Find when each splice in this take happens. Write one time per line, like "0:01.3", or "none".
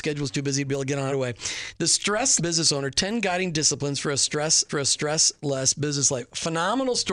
0:01.1
0:02.4
0:04.7